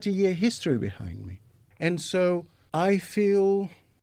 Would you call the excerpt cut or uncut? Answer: uncut